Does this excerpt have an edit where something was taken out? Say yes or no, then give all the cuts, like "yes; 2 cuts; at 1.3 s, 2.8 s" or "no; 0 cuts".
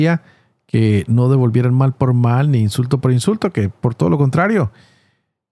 no; 0 cuts